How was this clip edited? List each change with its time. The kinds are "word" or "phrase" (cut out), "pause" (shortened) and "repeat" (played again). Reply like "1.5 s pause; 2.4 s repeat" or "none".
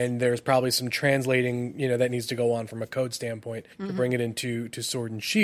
3.7 s pause